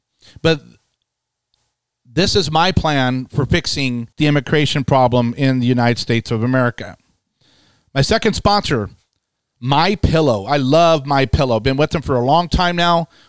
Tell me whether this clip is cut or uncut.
cut